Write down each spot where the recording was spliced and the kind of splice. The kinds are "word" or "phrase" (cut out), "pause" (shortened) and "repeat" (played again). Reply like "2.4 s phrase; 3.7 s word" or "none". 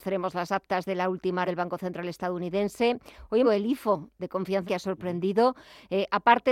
1.4 s word; 3.4 s phrase; 4.6 s phrase